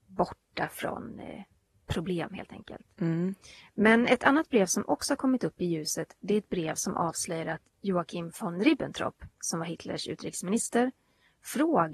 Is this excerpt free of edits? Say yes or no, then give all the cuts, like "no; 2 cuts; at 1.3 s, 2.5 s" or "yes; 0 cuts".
yes; 0 cuts